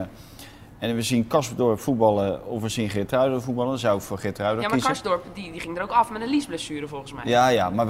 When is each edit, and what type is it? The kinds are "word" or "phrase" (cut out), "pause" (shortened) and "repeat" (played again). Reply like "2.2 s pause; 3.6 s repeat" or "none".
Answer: none